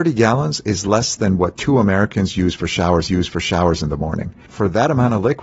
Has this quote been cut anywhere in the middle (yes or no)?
yes